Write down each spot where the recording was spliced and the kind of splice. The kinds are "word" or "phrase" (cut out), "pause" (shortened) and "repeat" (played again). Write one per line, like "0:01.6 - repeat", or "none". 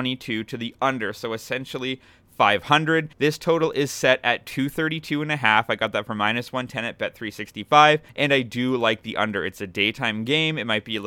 0:03.1 - pause
0:08.1 - pause